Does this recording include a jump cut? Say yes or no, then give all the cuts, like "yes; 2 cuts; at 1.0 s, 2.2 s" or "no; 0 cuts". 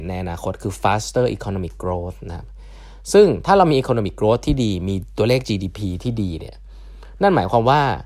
no; 0 cuts